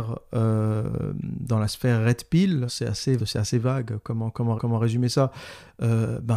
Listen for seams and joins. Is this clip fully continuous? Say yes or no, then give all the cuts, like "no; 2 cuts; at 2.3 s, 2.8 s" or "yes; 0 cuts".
no; 3 cuts; at 2.7 s, 3.2 s, 4.6 s